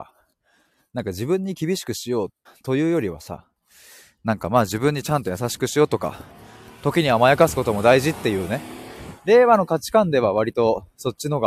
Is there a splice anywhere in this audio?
yes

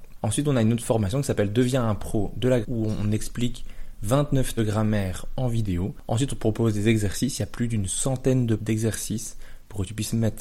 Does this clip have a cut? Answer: yes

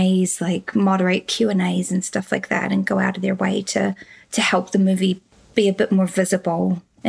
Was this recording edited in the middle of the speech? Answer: no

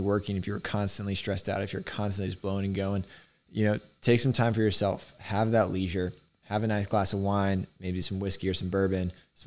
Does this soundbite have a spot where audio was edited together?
no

